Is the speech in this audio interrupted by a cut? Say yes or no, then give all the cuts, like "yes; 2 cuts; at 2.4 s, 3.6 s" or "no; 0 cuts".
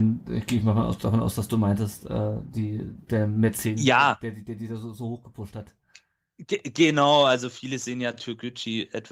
no; 0 cuts